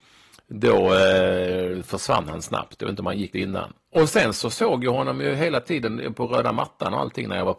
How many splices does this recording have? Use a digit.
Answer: 1